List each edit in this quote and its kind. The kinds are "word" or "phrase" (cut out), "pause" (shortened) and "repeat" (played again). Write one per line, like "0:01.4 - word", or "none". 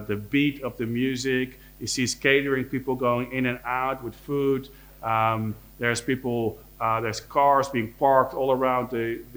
none